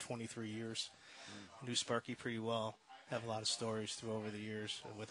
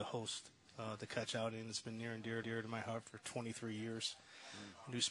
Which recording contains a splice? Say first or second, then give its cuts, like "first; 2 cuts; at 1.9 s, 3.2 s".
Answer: second; 1 cut; at 2.4 s